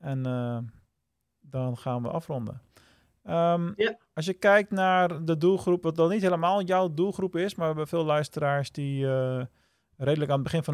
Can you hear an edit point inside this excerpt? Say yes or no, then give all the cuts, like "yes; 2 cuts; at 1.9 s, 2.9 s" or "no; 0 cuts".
no; 0 cuts